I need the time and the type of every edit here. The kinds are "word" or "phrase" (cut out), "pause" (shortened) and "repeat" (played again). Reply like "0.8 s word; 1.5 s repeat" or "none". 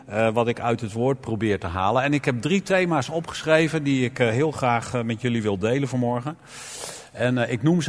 none